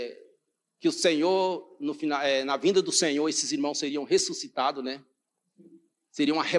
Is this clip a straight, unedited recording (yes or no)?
yes